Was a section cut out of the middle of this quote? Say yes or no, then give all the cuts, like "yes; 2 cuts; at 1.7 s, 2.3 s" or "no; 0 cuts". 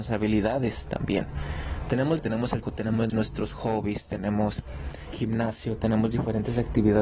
yes; 4 cuts; at 2.2 s, 2.6 s, 3.1 s, 5.1 s